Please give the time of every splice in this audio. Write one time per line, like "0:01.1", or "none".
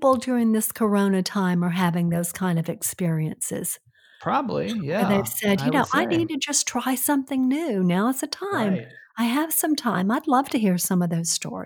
none